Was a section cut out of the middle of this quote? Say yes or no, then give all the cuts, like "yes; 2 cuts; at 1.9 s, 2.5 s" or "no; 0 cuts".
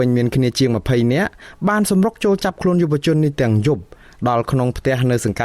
no; 0 cuts